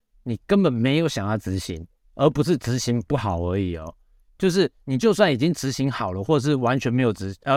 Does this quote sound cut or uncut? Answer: uncut